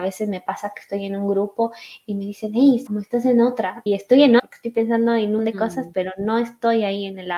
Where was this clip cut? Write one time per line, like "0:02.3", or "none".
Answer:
0:02.9
0:03.9
0:04.4
0:05.4